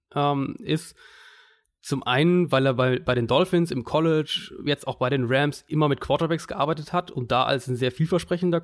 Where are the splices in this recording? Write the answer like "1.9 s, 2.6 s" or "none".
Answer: none